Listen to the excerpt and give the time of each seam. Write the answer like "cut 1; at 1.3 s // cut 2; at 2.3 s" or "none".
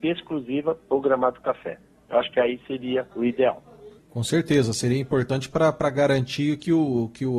cut 1; at 3.1 s // cut 2; at 4.0 s

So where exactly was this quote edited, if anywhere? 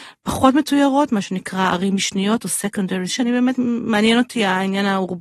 cut 1; at 3.1 s

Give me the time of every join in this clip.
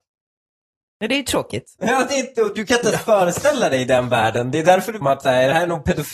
cut 1; at 5.0 s

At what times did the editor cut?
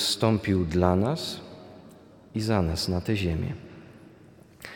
none

